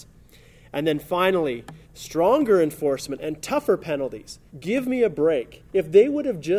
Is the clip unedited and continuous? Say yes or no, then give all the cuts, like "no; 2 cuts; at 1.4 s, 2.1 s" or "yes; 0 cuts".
no; 3 cuts; at 1.8 s, 4.5 s, 5.7 s